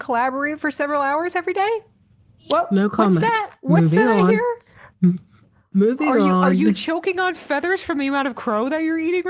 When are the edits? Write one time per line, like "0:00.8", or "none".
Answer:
none